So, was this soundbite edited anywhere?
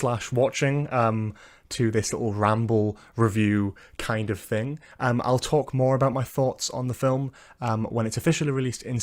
no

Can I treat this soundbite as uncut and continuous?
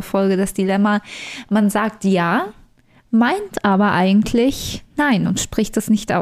yes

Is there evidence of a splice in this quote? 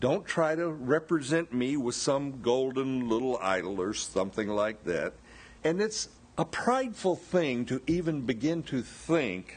yes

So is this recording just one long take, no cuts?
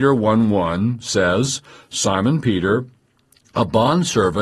yes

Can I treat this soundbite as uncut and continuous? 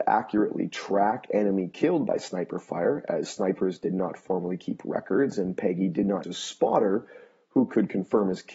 no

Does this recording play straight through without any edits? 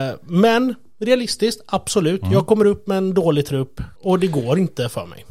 no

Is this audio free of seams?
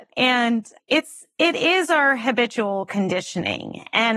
yes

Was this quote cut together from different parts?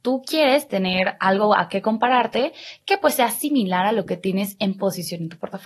no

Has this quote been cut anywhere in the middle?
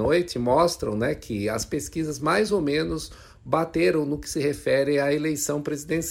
no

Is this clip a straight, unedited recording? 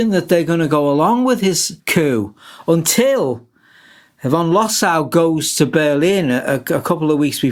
yes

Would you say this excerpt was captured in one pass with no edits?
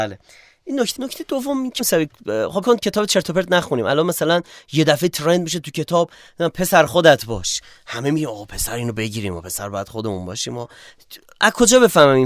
no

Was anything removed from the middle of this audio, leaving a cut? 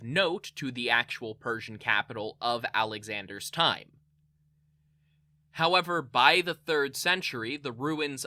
no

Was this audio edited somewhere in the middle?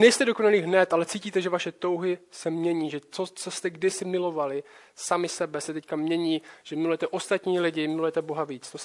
no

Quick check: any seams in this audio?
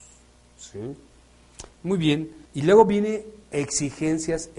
yes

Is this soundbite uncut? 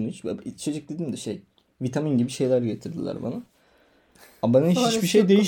yes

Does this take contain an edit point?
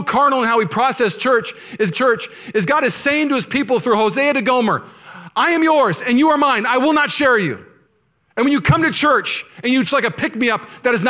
yes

